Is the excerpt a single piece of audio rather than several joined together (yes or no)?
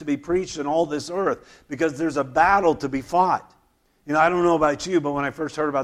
yes